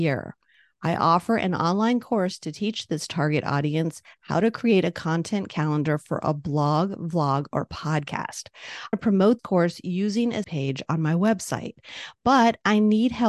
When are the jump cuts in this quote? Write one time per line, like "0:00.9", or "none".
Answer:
0:08.9
0:09.4
0:10.4